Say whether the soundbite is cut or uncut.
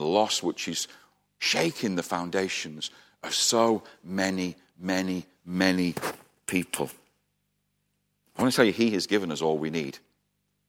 uncut